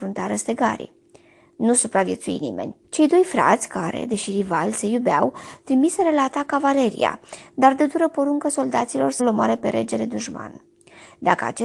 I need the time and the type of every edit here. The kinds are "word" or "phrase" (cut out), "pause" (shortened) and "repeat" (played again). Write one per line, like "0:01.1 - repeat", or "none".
0:02.8 - pause
0:09.2 - word